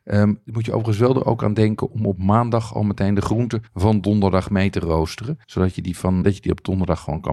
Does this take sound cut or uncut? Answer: cut